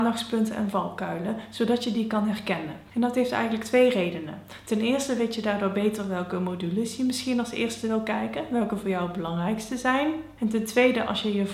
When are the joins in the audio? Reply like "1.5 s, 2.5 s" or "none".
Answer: none

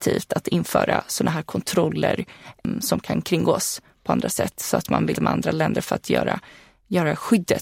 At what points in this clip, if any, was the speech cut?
5.1 s

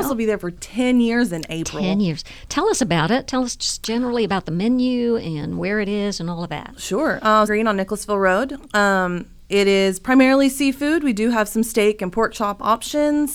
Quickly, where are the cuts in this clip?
7.5 s

